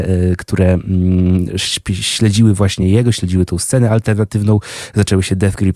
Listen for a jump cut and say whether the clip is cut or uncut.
uncut